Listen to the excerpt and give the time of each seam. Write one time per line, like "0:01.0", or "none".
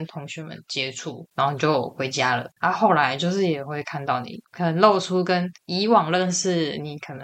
0:05.6